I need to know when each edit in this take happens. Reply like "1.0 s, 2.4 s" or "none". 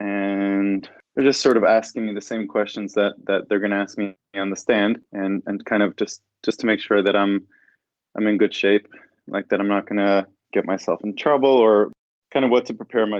none